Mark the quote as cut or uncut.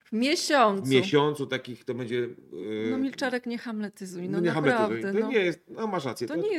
uncut